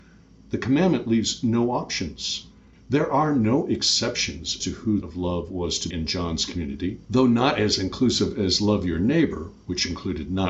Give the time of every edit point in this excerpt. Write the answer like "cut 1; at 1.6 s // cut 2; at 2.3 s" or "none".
cut 1; at 4.6 s // cut 2; at 5.0 s // cut 3; at 5.9 s // cut 4; at 7.0 s